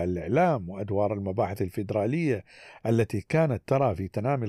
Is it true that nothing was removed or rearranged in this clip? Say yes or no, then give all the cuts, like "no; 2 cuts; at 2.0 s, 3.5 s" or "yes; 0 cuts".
yes; 0 cuts